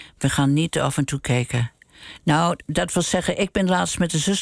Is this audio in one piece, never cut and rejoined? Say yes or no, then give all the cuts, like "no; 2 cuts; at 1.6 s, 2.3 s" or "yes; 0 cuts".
yes; 0 cuts